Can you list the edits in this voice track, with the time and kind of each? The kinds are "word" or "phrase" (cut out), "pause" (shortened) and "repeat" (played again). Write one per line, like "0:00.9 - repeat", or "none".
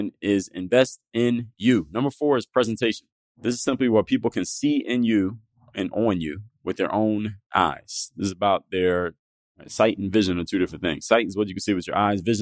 none